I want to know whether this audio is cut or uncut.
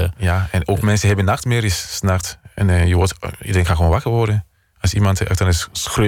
uncut